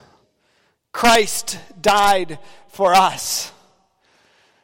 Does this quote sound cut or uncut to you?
uncut